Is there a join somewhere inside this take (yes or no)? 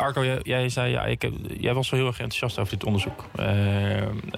no